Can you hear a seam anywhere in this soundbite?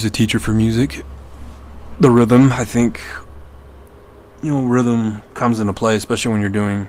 yes; 1 cut; at 5.3 s

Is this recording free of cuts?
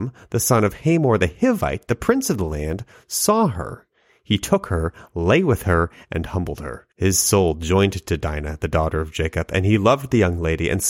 no; 1 cut; at 6.9 s

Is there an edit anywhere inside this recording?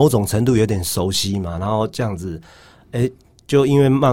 no; 0 cuts

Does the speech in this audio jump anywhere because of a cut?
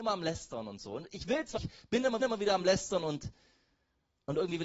yes; 2 cuts; at 1.6 s, 2.2 s

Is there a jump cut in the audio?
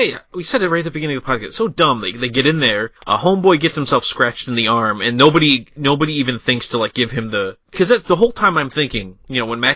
yes; 1 cut; at 3.0 s

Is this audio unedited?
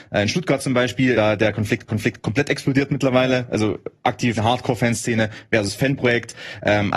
no; 3 cuts; at 1.1 s, 1.9 s, 4.4 s

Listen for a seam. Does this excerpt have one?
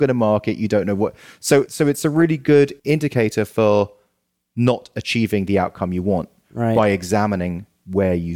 yes; 2 cuts; at 1.7 s, 2.8 s

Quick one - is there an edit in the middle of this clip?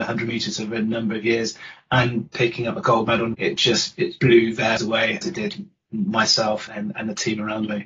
yes; 5 cuts; at 3.3 s, 4.2 s, 4.8 s, 5.2 s, 6.7 s

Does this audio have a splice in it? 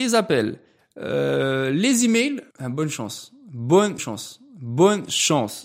yes; 2 cuts; at 2.5 s, 4.0 s

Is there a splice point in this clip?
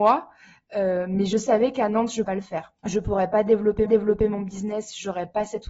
yes; 3 cuts; at 2.2 s, 2.8 s, 3.9 s

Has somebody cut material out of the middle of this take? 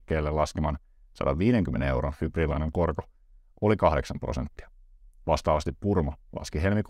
no; 0 cuts

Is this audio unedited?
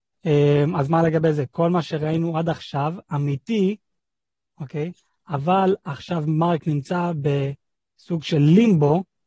yes; 0 cuts

